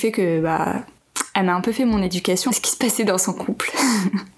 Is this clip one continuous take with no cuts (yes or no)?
no